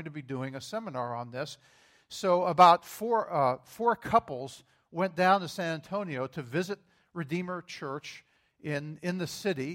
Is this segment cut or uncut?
uncut